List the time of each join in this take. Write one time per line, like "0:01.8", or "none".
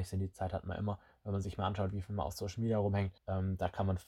0:03.2